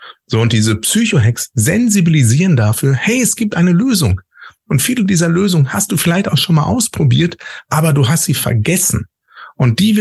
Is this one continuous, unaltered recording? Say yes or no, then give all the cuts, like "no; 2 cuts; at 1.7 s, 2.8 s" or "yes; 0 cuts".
yes; 0 cuts